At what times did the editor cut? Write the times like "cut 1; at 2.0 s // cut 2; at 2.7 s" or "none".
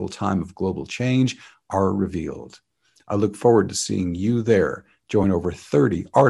none